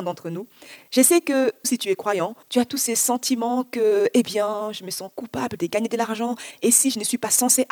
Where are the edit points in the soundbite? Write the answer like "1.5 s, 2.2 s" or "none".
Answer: 1.6 s, 2.4 s